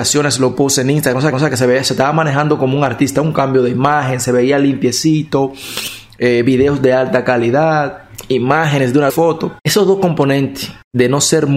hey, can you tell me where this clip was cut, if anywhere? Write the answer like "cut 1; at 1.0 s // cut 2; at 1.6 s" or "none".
cut 1; at 1.3 s // cut 2; at 9.1 s